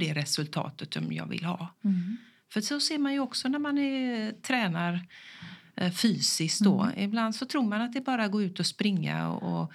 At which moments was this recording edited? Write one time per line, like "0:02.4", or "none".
none

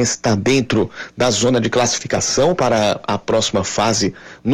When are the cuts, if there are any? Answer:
none

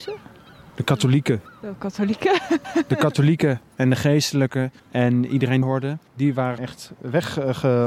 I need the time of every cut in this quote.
0:02.6
0:04.8
0:05.6
0:06.1
0:06.6

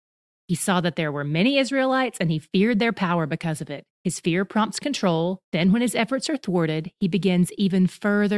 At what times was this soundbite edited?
0:03.9
0:05.4

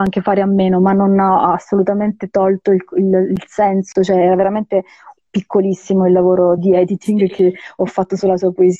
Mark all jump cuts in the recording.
0:06.6

